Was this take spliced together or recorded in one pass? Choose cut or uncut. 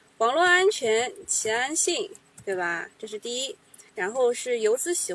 cut